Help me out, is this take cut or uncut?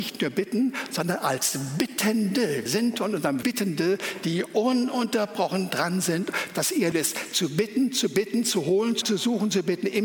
cut